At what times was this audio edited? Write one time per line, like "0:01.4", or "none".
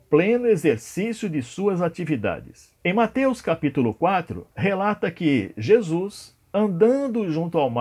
0:02.8
0:04.5
0:06.4